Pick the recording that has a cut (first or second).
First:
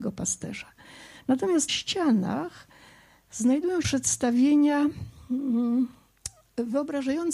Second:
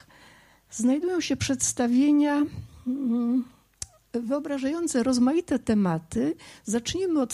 first